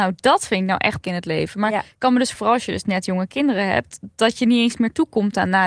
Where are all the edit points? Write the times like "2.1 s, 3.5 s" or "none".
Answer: 1.0 s, 2.4 s